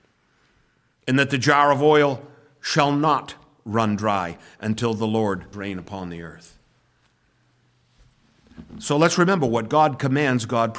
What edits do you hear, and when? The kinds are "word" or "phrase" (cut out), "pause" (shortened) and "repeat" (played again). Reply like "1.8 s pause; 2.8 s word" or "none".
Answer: 5.5 s word